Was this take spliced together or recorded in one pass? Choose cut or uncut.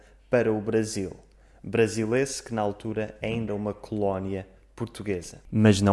cut